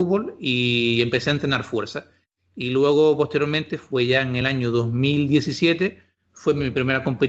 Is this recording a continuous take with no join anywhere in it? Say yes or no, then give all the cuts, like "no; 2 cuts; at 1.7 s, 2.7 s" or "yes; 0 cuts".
yes; 0 cuts